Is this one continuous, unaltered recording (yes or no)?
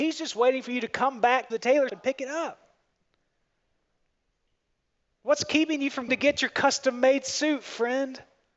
no